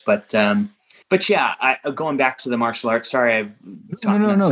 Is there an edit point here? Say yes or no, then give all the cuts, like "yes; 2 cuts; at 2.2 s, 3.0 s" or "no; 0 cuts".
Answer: yes; 1 cut; at 1.0 s